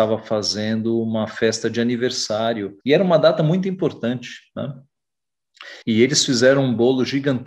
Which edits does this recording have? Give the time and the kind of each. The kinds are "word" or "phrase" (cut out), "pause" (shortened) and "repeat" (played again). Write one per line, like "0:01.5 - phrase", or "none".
0:02.8 - pause
0:05.8 - pause